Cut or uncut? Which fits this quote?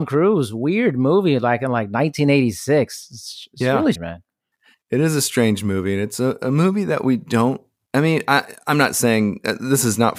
cut